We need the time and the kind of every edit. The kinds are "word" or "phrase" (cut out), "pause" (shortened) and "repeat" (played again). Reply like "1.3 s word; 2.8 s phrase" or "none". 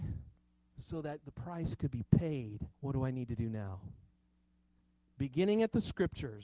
2.7 s pause